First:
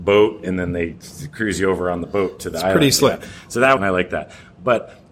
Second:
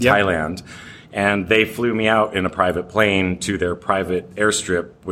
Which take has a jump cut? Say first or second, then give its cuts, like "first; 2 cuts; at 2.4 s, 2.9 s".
first; 1 cut; at 3.8 s